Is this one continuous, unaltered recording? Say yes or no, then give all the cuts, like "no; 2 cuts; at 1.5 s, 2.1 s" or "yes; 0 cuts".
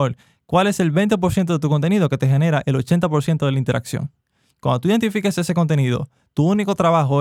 yes; 0 cuts